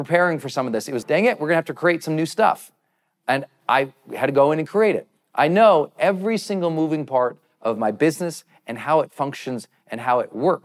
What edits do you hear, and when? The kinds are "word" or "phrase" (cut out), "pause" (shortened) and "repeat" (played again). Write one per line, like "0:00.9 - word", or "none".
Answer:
0:01.0 - word